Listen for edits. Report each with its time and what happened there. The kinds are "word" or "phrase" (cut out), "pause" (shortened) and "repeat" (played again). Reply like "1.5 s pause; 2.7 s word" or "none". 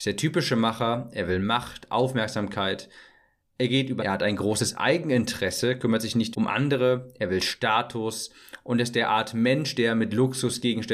4.0 s word; 6.3 s word